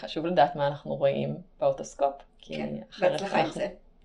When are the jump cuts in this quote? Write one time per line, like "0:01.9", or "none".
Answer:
none